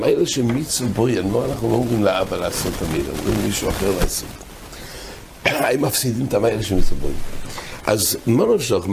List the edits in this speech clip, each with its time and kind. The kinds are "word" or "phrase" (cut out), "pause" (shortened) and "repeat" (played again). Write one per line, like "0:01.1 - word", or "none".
none